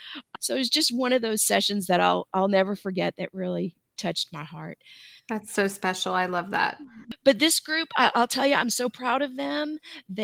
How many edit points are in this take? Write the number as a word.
one